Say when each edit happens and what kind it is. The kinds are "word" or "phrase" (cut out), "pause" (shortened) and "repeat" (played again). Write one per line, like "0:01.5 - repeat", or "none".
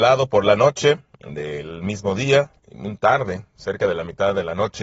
none

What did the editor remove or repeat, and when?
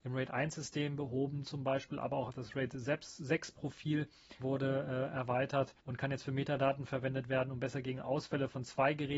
0:04.4 - word
0:05.8 - pause

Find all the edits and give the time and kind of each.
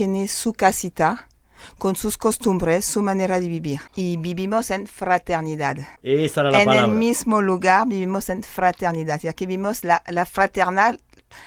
0:03.9 - pause
0:06.0 - pause

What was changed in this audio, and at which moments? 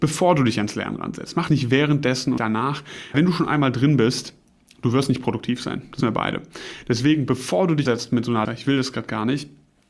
0:01.5 - word
0:02.4 - word
0:03.1 - word
0:06.0 - word
0:07.9 - word
0:08.5 - phrase

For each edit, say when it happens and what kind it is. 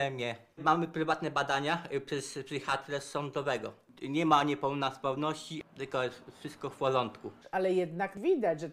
none

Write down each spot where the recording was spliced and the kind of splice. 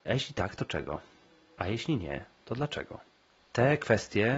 none

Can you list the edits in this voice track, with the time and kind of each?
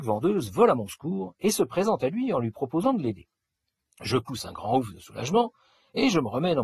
none

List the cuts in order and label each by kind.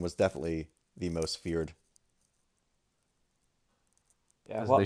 none

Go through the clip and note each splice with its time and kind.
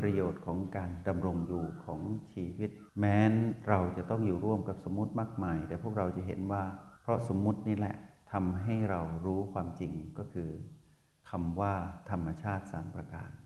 0:02.9 - pause
0:07.0 - pause

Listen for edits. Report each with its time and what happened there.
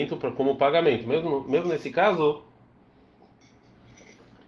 none

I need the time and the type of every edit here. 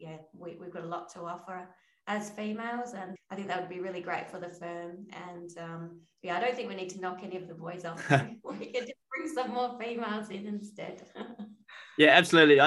0:03.2 - word

